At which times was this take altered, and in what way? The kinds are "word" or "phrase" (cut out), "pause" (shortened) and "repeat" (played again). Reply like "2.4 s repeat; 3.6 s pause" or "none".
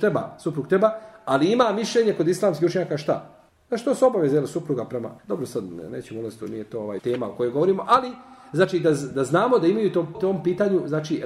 3.5 s pause; 5.2 s pause; 7.0 s word; 10.1 s word